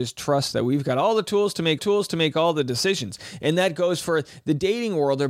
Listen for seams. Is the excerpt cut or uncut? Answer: cut